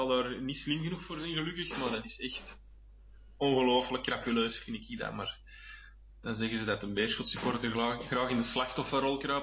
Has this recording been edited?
no; 0 cuts

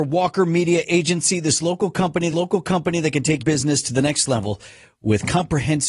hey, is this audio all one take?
no; 2 cuts; at 2.3 s, 3.4 s

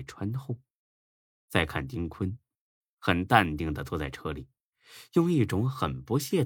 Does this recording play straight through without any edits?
yes; 0 cuts

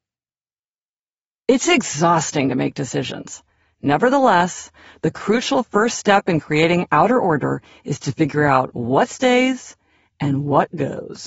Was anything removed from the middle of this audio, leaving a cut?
no; 0 cuts

